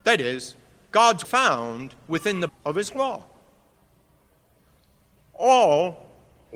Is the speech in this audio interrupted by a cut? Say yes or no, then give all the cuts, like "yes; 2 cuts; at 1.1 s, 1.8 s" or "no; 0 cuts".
yes; 2 cuts; at 1.2 s, 2.5 s